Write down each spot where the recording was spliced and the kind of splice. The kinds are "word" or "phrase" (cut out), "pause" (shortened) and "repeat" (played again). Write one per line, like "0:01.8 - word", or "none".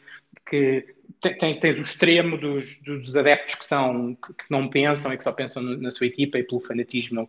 none